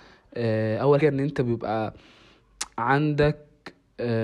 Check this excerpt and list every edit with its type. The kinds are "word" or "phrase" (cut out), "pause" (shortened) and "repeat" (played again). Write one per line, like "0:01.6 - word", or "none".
0:01.0 - word